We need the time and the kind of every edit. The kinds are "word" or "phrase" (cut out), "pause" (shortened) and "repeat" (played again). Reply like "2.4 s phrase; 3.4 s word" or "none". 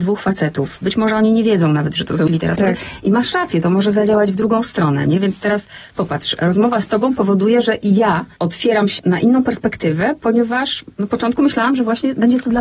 2.3 s word; 8.3 s pause; 9.0 s word